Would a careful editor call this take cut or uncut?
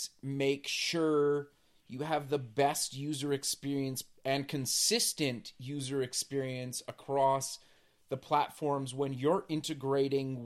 uncut